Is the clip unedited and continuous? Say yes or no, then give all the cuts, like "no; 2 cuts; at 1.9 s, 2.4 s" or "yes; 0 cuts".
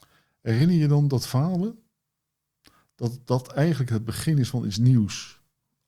yes; 0 cuts